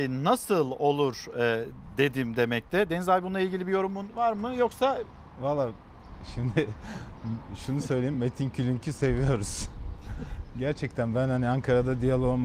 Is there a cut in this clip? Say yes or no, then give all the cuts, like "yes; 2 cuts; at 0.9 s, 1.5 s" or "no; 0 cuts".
no; 0 cuts